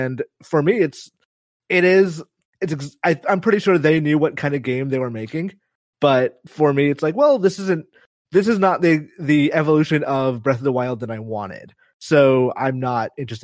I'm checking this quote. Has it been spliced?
no; 0 cuts

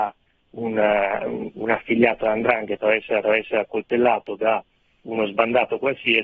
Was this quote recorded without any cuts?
no; 1 cut; at 3.2 s

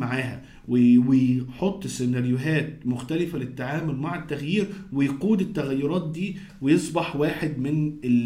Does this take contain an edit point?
no; 0 cuts

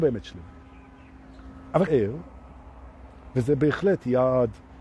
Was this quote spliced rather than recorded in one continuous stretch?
yes; 1 cut; at 1.9 s

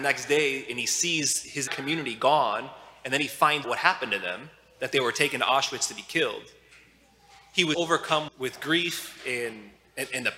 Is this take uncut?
no; 4 cuts; at 1.7 s, 3.6 s, 7.7 s, 8.3 s

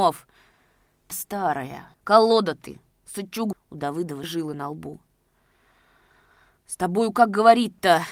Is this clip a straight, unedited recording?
no; 4 cuts; at 1.1 s, 1.9 s, 3.5 s, 4.2 s

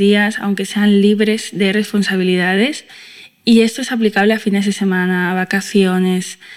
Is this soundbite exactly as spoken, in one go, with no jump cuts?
yes; 0 cuts

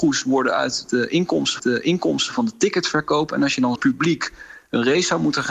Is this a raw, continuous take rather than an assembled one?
no; 2 cuts; at 1.6 s, 3.8 s

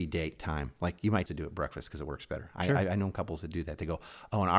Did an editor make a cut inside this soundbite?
yes; 1 cut; at 1.3 s

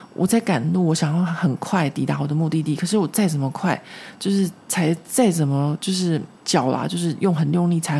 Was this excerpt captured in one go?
no; 2 cuts; at 4.6 s, 6.3 s

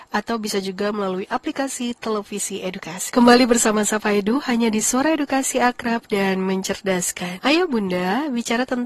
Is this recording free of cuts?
yes; 0 cuts

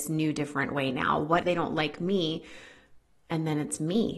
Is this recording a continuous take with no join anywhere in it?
no; 1 cut; at 1.4 s

